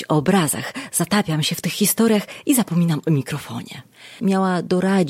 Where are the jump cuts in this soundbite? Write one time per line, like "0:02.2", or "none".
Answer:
0:04.2